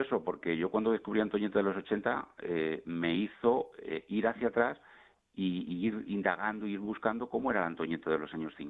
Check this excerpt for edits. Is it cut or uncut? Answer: uncut